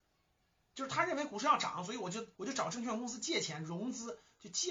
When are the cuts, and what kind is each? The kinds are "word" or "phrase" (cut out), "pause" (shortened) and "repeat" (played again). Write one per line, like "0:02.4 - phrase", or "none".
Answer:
0:02.3 - pause